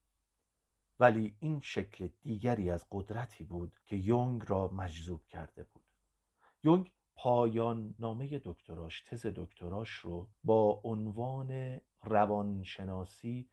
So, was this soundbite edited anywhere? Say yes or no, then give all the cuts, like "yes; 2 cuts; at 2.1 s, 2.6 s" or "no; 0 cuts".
yes; 2 cuts; at 3.8 s, 10.3 s